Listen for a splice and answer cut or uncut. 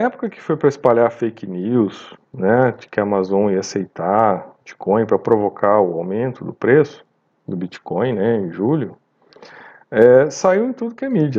uncut